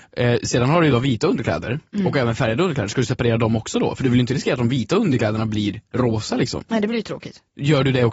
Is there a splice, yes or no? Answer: yes